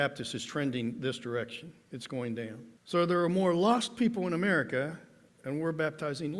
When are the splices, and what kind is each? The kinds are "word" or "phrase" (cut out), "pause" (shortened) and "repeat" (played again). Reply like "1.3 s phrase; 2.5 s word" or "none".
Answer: 2.8 s pause